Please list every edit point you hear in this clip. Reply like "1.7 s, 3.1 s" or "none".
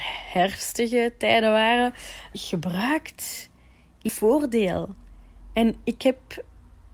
2.3 s, 4.1 s